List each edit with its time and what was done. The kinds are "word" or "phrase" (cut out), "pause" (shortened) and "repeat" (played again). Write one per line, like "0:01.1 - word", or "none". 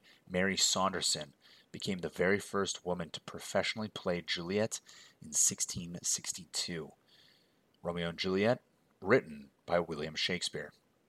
none